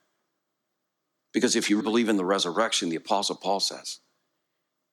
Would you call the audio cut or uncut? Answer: cut